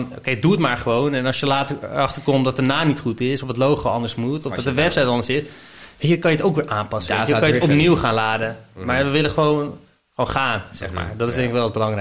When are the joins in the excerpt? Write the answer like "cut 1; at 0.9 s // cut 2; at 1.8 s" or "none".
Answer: none